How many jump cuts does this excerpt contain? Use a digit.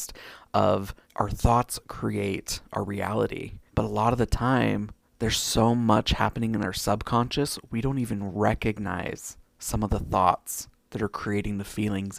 4